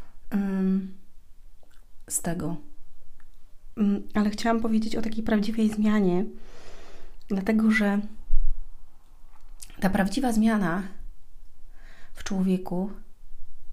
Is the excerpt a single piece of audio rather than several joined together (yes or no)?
yes